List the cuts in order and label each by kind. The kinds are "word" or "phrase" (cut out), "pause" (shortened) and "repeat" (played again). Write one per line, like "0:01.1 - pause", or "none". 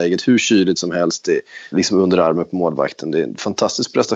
0:01.7 - word